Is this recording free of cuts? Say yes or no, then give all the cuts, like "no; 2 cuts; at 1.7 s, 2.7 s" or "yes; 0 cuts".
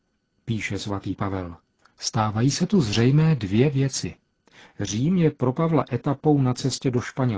yes; 0 cuts